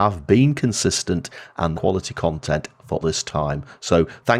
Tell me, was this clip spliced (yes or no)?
yes